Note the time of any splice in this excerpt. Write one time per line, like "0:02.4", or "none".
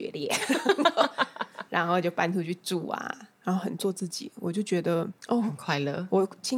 0:03.3
0:05.2